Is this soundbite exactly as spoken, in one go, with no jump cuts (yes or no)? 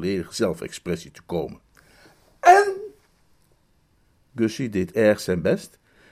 yes